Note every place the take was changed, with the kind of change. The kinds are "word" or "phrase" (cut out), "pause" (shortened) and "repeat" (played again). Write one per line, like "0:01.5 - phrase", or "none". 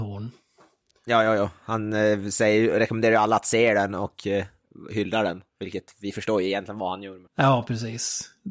0:05.5 - pause
0:07.3 - pause